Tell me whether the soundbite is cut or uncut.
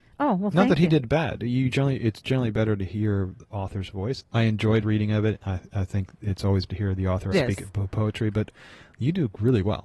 cut